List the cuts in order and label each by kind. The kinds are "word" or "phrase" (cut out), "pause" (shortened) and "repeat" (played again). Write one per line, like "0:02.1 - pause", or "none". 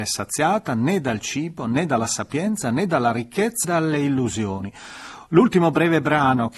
0:03.6 - word